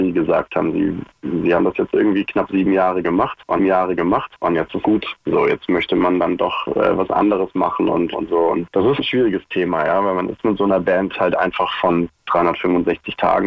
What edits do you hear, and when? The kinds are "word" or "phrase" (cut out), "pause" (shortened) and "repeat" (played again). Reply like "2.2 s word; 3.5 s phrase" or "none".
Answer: 3.6 s repeat; 4.8 s word; 5.2 s pause; 8.1 s phrase; 9.0 s word